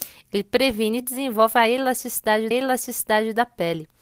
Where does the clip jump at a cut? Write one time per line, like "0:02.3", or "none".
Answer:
0:01.0
0:02.5